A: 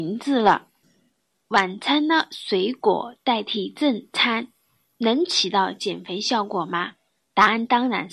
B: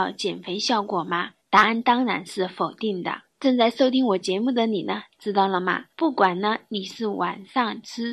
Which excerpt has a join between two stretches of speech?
B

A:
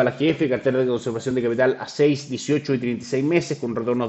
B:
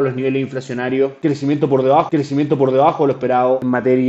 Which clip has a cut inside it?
B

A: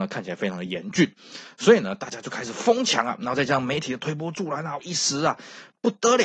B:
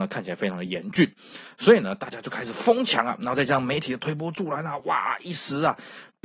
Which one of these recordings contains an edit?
A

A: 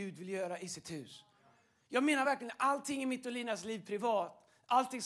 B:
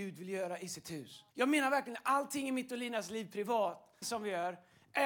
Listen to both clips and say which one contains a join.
B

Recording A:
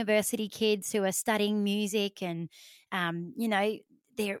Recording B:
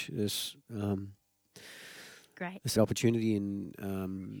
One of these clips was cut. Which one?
B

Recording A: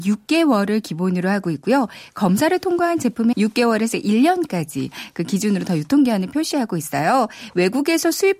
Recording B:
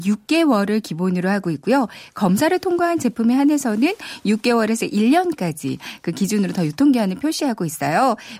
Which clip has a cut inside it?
A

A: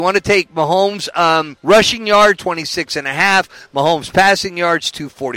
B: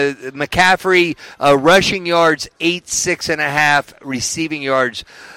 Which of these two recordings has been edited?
A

